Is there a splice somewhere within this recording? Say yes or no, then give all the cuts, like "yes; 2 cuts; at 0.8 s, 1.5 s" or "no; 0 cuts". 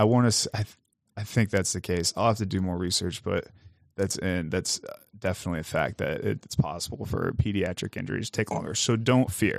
no; 0 cuts